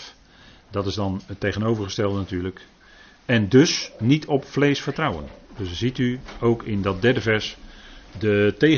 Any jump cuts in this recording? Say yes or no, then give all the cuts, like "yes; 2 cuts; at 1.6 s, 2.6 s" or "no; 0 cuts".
no; 0 cuts